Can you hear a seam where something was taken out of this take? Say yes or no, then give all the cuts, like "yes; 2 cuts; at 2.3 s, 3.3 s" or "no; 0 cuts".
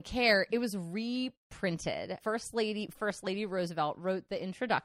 yes; 2 cuts; at 2.2 s, 2.9 s